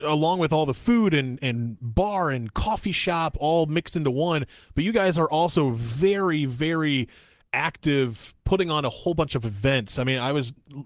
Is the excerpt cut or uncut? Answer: uncut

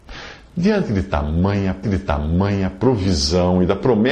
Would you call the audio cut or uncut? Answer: cut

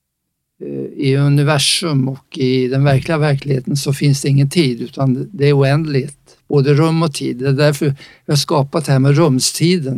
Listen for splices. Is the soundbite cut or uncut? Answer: uncut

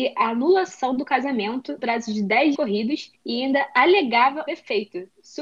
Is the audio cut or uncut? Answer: cut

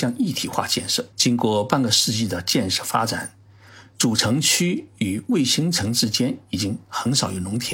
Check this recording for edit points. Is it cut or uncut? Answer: cut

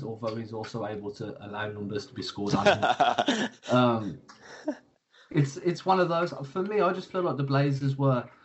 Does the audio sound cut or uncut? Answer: uncut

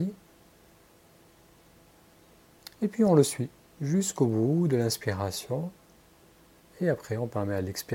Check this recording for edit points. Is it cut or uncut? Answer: uncut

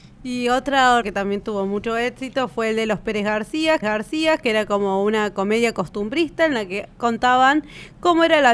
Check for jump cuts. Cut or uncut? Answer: cut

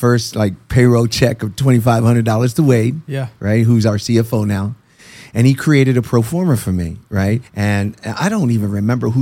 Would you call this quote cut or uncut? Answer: cut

